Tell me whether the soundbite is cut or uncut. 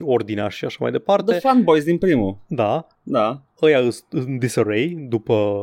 uncut